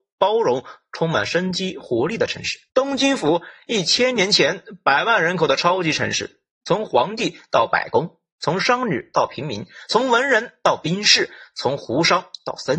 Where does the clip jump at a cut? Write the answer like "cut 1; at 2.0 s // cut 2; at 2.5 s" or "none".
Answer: cut 1; at 2.7 s